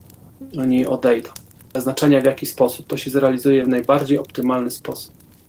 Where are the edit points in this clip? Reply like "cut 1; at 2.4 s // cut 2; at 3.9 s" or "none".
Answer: none